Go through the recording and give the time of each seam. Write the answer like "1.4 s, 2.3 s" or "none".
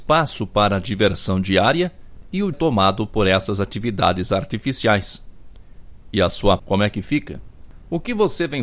2.5 s, 6.6 s